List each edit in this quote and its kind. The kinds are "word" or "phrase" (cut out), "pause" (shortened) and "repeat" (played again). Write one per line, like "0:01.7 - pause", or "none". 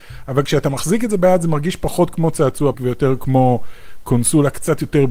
0:02.7 - word